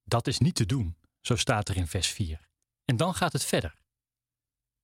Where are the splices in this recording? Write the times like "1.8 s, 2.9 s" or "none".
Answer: 2.6 s